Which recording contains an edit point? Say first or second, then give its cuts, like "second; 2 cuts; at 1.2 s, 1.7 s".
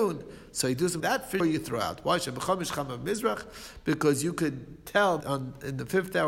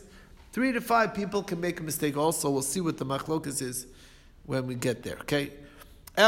first; 3 cuts; at 1.0 s, 1.4 s, 5.2 s